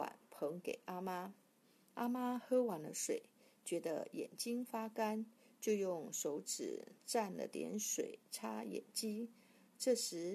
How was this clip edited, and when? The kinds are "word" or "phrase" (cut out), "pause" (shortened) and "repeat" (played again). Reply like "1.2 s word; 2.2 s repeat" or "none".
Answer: 7.0 s pause